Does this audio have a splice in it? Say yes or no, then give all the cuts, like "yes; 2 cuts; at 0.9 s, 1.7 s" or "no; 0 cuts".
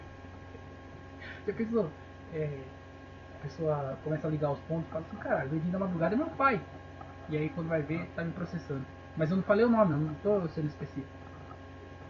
no; 0 cuts